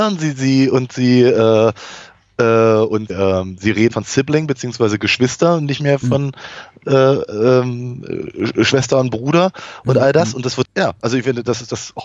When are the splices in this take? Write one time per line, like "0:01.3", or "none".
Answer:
0:03.1
0:03.9
0:10.6